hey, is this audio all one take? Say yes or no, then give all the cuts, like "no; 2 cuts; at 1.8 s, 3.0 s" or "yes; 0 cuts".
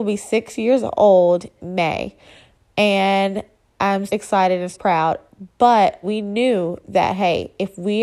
no; 4 cuts; at 1.6 s, 4.1 s, 4.7 s, 6.0 s